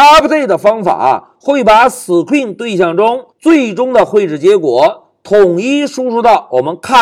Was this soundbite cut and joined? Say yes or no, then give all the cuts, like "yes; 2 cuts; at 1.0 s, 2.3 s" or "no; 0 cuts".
yes; 1 cut; at 3.3 s